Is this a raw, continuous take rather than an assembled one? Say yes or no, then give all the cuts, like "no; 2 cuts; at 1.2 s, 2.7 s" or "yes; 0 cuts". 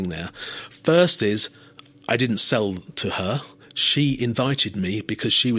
yes; 0 cuts